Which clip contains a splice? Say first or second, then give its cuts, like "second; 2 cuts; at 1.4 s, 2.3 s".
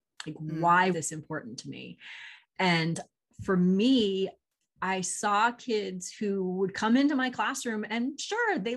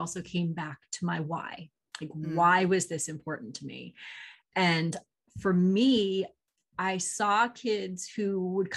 first; 1 cut; at 0.9 s